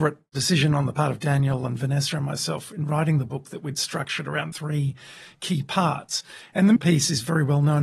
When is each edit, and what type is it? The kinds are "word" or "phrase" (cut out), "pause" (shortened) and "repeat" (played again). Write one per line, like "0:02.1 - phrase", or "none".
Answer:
0:04.5 - word
0:06.8 - word

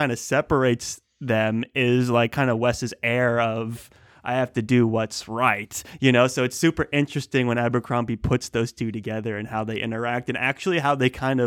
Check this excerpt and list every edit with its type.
none

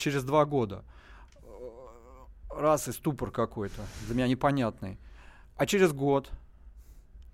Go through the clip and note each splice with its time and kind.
none

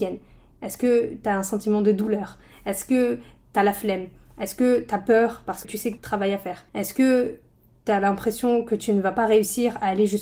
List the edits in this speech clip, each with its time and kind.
0:05.6 - word
0:06.0 - phrase
0:06.7 - pause

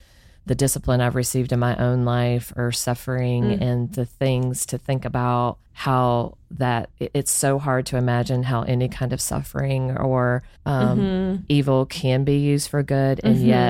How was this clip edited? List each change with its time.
0:05.7 - pause
0:07.0 - pause
0:10.6 - pause

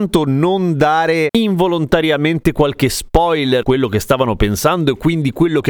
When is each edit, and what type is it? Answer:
0:03.6 - word

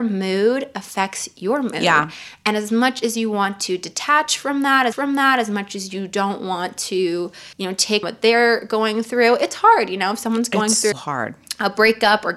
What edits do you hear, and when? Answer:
0:04.9 - repeat
0:07.5 - pause
0:08.0 - word
0:10.9 - word

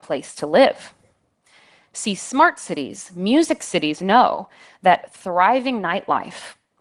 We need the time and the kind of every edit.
none

